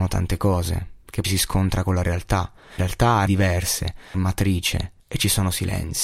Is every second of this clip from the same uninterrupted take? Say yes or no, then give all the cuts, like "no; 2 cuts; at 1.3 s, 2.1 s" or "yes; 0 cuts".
no; 5 cuts; at 1.2 s, 2.8 s, 3.3 s, 4.1 s, 5.0 s